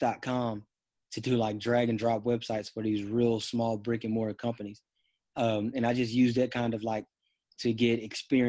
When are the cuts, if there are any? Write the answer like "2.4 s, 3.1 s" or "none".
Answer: none